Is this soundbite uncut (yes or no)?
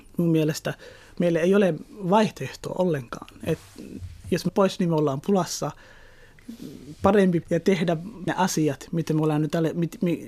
no